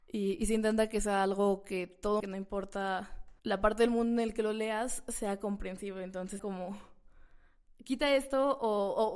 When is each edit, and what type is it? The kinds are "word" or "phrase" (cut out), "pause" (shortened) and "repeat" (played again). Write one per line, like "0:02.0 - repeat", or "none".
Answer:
0:02.2 - phrase
0:03.4 - pause
0:06.4 - word